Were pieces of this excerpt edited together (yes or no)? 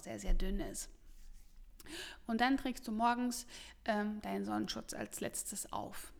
no